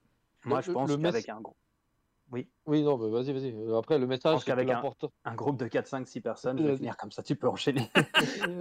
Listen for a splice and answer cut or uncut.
cut